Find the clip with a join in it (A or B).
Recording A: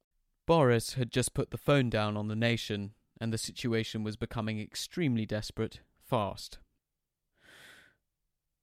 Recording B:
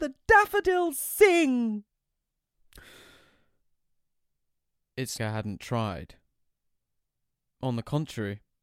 B